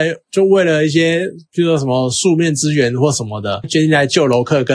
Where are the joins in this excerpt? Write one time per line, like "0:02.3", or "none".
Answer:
0:03.6